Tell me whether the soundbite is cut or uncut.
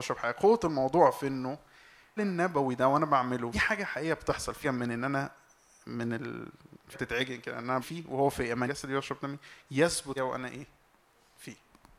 cut